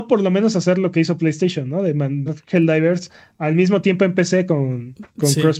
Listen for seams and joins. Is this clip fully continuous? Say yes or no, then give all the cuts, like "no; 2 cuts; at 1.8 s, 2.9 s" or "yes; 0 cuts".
no; 1 cut; at 2.3 s